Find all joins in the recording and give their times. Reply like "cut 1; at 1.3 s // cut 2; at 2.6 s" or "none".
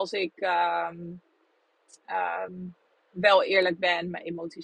none